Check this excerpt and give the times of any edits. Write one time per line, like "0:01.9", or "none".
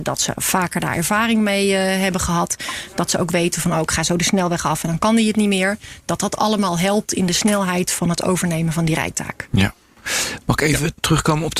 none